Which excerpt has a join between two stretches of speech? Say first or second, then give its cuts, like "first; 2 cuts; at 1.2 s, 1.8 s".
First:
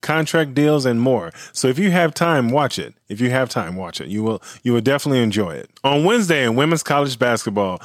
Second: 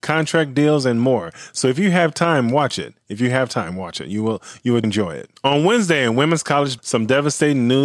second; 2 cuts; at 4.8 s, 6.8 s